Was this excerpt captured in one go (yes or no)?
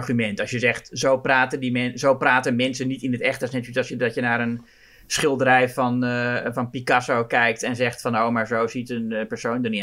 yes